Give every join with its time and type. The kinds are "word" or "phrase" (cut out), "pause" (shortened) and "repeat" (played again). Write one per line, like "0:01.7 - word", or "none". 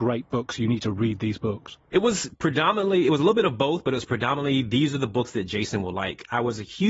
0:01.9 - pause